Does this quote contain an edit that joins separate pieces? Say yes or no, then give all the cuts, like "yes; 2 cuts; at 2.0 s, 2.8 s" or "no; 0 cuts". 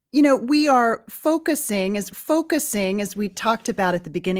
yes; 1 cut; at 2.1 s